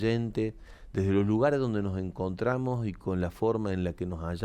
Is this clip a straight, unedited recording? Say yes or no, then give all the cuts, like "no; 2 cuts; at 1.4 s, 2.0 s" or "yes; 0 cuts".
yes; 0 cuts